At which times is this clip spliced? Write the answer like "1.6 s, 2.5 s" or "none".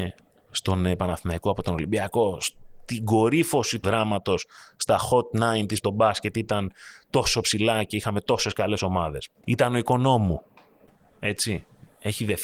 3.8 s, 5.8 s, 9.3 s